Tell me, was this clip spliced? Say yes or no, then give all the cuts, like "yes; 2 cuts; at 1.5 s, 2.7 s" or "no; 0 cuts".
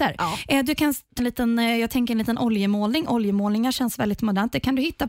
yes; 1 cut; at 1.2 s